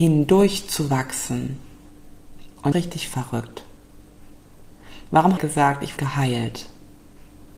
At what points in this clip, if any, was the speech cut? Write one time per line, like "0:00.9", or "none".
0:02.7
0:05.4
0:06.0